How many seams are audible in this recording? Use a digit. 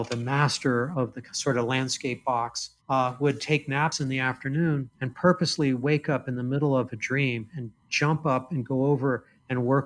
2